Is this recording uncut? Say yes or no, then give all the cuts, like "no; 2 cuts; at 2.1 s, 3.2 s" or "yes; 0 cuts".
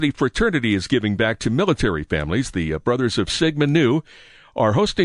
yes; 0 cuts